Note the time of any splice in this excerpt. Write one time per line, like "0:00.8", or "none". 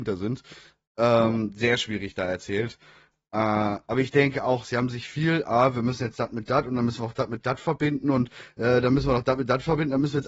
none